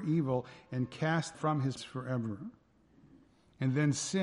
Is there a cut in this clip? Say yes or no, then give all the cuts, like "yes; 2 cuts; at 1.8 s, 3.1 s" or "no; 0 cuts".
yes; 2 cuts; at 1.3 s, 1.8 s